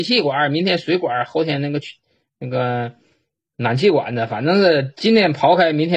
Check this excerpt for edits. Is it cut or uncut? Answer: uncut